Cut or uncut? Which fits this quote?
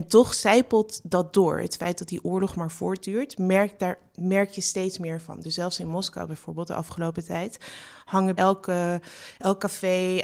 cut